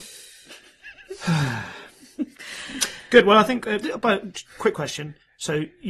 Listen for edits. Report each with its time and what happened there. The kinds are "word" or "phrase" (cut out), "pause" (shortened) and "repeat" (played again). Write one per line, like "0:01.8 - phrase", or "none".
none